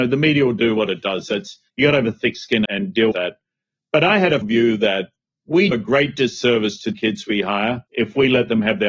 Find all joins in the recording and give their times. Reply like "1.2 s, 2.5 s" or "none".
1.7 s, 2.7 s, 3.1 s, 4.4 s, 5.7 s, 6.9 s, 7.9 s

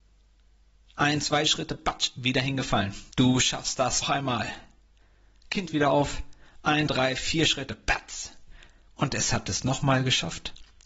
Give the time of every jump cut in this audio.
3.1 s, 4.0 s, 5.7 s, 6.9 s, 8.9 s

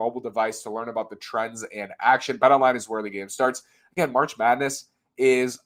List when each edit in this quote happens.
none

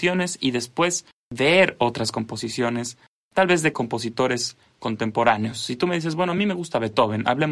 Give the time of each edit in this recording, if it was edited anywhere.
none

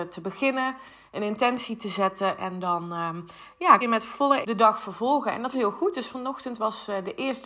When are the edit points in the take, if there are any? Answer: 3.8 s, 4.4 s, 5.5 s

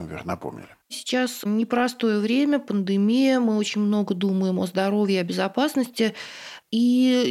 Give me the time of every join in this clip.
none

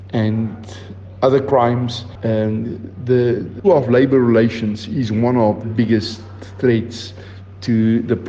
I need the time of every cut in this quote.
3.6 s, 5.6 s

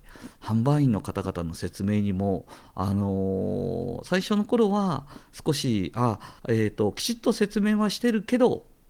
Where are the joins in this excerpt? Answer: 6.4 s

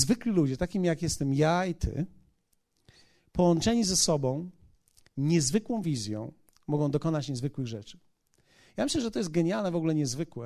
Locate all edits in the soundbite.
none

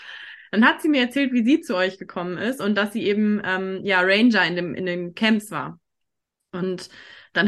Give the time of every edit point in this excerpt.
none

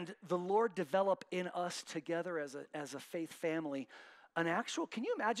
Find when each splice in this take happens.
none

